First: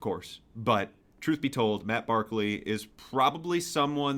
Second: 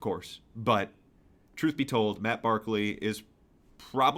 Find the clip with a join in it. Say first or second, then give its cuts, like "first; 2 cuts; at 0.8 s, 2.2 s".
first; 2 cuts; at 1.0 s, 2.9 s